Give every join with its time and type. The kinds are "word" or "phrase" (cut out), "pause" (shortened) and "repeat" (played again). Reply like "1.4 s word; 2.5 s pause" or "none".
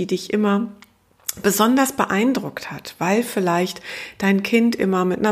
none